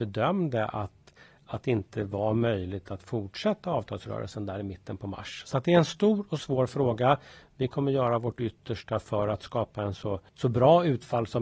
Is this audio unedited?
yes; 0 cuts

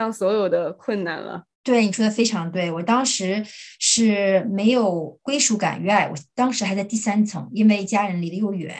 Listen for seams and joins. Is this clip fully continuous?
no; 1 cut; at 1.5 s

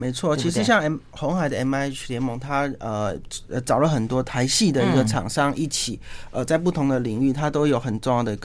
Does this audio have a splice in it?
no; 0 cuts

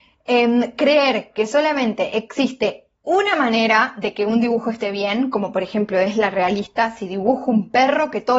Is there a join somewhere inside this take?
no; 0 cuts

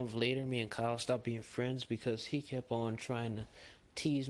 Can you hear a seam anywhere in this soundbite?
no; 0 cuts

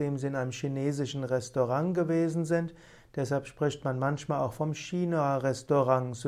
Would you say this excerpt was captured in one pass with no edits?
yes; 0 cuts

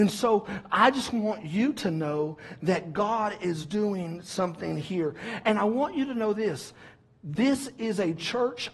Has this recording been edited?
no; 0 cuts

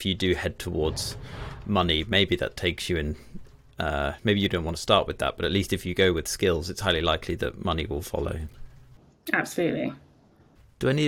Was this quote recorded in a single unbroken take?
yes; 0 cuts

